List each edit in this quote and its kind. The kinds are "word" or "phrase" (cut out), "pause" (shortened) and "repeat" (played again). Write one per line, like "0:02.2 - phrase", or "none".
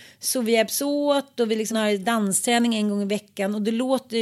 0:01.7 - word